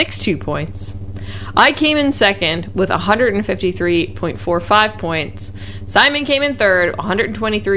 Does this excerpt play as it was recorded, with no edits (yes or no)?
yes